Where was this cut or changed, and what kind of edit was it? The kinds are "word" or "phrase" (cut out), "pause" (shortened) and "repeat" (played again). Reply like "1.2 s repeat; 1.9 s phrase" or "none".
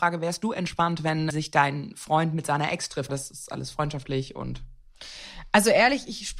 1.3 s word; 3.1 s phrase